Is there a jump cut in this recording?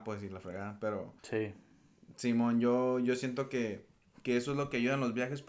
yes; 1 cut; at 1.2 s

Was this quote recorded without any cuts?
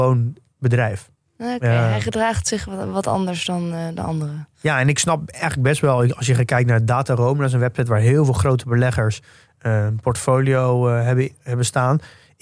yes; 0 cuts

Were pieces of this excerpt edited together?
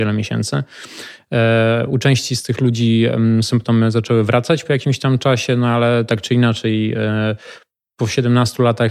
no; 0 cuts

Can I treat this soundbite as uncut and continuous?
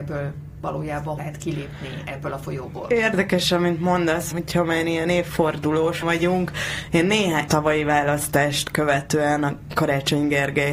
no; 4 cuts; at 1.2 s, 4.3 s, 6.0 s, 7.5 s

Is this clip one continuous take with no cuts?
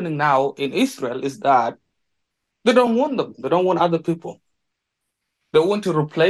yes; 0 cuts

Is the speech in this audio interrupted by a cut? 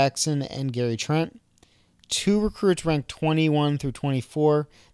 no; 0 cuts

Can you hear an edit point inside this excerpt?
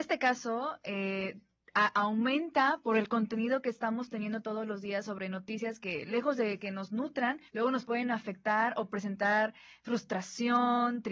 yes; 1 cut; at 7.5 s

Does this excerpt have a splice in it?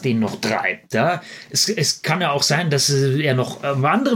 no; 0 cuts

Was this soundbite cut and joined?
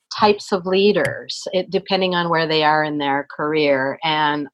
no; 0 cuts

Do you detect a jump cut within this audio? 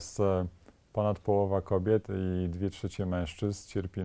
no; 0 cuts

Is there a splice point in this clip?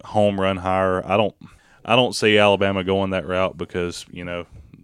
yes; 1 cut; at 1.6 s

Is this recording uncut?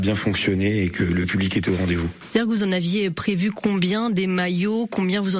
yes; 0 cuts

